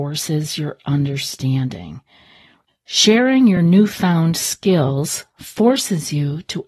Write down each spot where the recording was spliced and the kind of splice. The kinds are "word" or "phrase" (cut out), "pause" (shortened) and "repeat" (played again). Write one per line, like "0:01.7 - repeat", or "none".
none